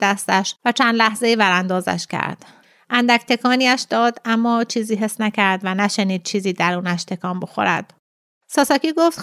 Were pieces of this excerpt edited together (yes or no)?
no